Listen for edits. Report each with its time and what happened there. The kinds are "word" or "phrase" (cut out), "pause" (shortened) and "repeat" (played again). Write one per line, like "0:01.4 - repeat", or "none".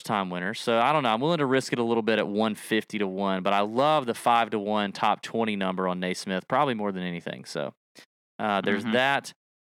none